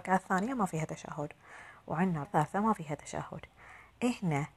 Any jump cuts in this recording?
yes; 1 cut; at 2.2 s

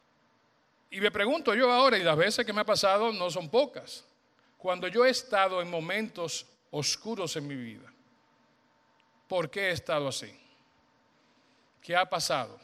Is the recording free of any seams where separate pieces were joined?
yes; 0 cuts

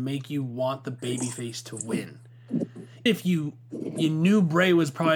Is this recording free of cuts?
no; 1 cut; at 3.1 s

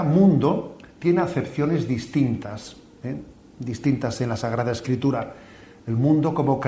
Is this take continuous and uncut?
yes; 0 cuts

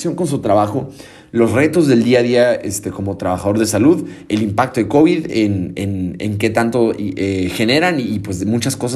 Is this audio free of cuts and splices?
yes; 0 cuts

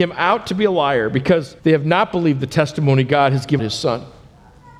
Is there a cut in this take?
yes; 2 cuts; at 1.6 s, 3.6 s

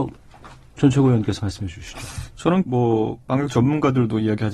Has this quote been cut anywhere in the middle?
yes; 1 cut; at 2.6 s

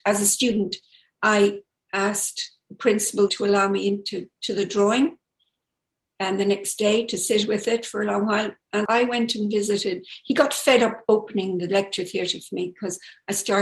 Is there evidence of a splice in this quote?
yes; 3 cuts; at 3.3 s, 4.3 s, 8.8 s

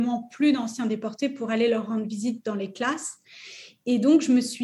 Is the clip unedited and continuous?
yes; 0 cuts

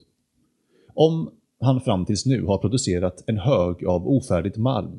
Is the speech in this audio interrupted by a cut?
no; 0 cuts

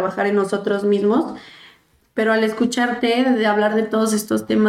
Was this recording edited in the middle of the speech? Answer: no; 0 cuts

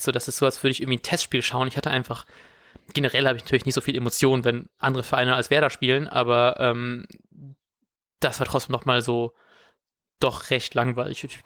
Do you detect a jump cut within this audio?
no; 0 cuts

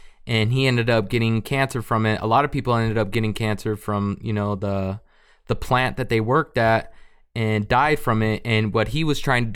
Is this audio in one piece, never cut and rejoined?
yes; 0 cuts

